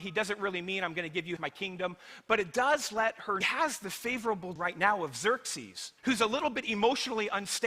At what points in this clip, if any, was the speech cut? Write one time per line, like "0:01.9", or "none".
0:01.4
0:03.4
0:04.6
0:06.0